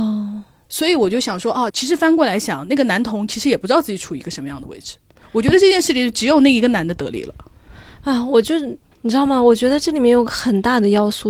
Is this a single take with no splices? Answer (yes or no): no